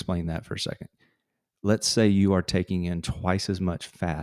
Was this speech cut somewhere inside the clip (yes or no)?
no